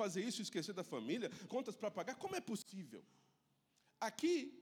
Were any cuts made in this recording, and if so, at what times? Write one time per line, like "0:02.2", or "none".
0:01.5